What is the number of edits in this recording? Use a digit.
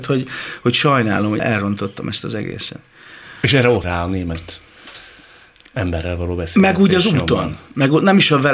2